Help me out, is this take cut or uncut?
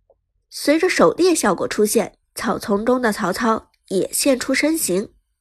cut